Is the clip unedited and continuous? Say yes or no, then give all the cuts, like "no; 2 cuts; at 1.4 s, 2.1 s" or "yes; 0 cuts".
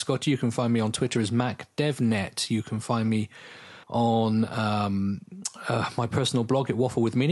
no; 1 cut; at 3.8 s